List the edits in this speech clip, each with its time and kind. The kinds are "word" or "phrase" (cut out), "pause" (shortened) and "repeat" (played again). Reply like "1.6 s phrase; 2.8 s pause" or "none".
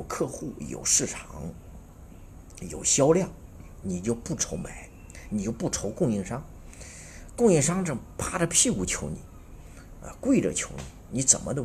none

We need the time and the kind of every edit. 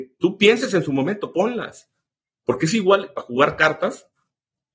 1.3 s word; 3.2 s word

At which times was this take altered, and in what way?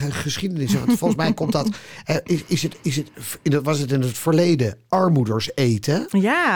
none

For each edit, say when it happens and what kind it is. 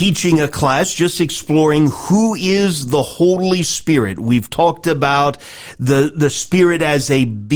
none

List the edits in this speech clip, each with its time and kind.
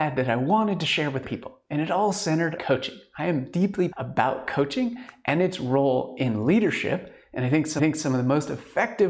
1.2 s word; 2.6 s word; 3.9 s word; 7.8 s repeat

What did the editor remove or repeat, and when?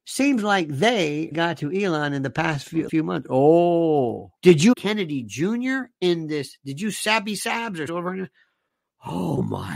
1.3 s word; 2.9 s word; 4.4 s pause; 4.7 s phrase; 7.9 s phrase

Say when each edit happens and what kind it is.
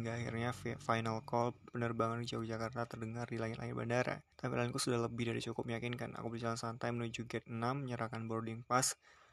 4.3 s pause

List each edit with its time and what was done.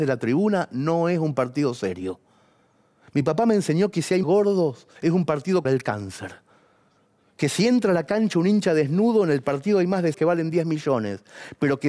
4.2 s phrase; 5.0 s pause; 5.6 s word; 10.1 s phrase

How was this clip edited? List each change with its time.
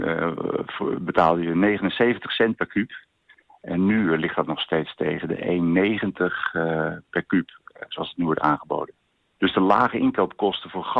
none

